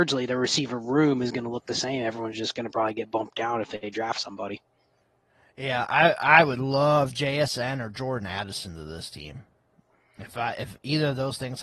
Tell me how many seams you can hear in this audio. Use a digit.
0